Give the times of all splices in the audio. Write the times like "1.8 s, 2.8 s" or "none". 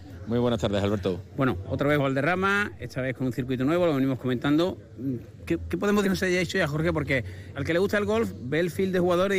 1.6 s, 2.0 s, 6.0 s, 7.5 s